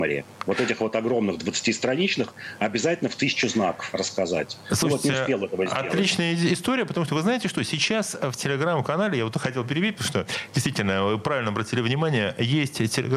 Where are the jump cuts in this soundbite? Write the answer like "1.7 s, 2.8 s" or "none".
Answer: none